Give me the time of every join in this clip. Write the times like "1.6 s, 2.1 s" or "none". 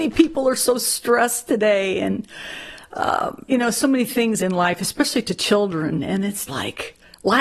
3.5 s, 4.4 s, 6.5 s